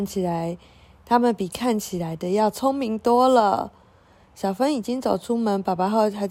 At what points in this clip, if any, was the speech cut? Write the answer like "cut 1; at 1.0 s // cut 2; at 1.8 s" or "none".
none